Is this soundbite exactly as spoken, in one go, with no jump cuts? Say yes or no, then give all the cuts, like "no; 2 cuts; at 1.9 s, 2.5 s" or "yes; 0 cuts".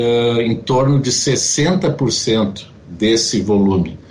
yes; 0 cuts